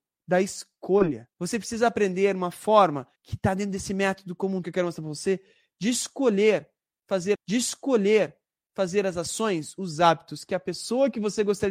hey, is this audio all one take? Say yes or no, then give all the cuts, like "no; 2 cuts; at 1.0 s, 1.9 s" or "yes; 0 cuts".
no; 4 cuts; at 1.3 s, 3.2 s, 4.6 s, 7.3 s